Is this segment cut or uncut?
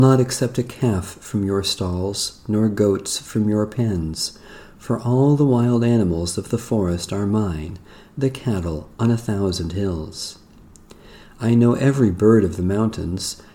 uncut